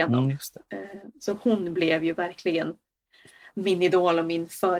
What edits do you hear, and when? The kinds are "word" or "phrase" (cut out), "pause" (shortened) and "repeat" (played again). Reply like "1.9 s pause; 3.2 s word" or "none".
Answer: none